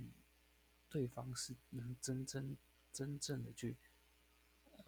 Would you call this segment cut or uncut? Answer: cut